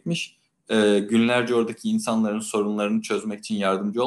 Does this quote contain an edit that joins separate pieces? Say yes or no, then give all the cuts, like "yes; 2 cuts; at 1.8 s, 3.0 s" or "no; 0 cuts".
no; 0 cuts